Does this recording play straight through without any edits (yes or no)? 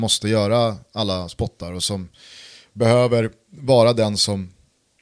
yes